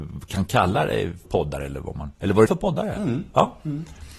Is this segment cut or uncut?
cut